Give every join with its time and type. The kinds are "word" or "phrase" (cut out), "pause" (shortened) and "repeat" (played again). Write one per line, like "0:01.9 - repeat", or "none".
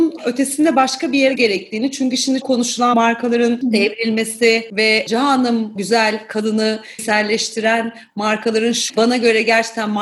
0:01.4 - word
0:02.4 - word
0:02.9 - word
0:05.8 - word
0:07.0 - word
0:08.9 - word